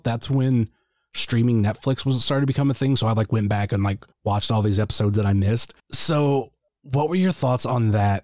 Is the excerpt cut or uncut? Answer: cut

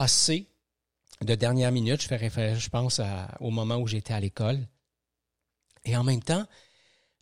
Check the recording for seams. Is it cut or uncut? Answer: uncut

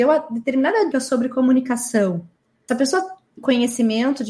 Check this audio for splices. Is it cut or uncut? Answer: cut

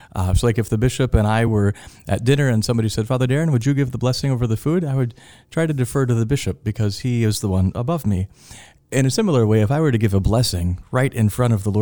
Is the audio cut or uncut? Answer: uncut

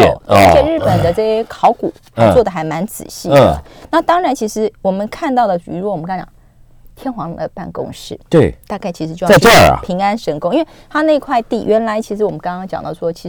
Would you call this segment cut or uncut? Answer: uncut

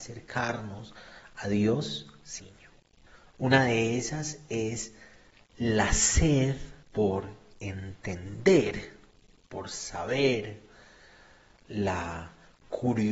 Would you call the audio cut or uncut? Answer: cut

